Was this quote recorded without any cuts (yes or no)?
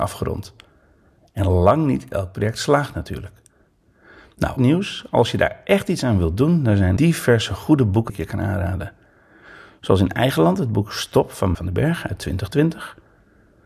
no